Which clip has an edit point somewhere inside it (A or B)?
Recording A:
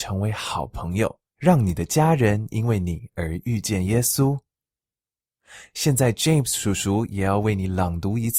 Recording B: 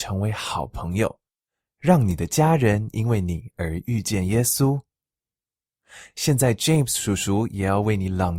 A